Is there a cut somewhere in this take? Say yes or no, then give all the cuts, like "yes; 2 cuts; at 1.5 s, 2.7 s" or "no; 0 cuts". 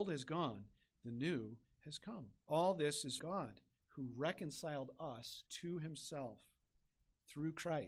yes; 3 cuts; at 2.4 s, 3.2 s, 5.5 s